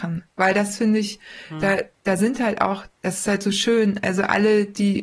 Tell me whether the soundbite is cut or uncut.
uncut